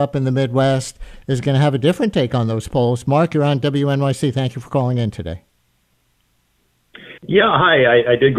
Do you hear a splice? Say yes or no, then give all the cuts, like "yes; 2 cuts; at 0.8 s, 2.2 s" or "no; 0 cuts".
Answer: yes; 1 cut; at 7.2 s